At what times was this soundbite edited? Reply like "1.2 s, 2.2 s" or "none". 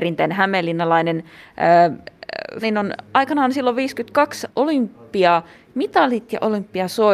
2.6 s, 4.5 s